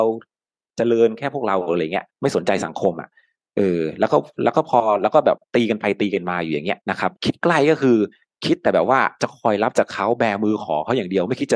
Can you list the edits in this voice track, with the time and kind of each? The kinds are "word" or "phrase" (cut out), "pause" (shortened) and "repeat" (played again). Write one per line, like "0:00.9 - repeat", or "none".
0:02.1 - pause
0:05.4 - pause
0:06.8 - pause
0:07.2 - pause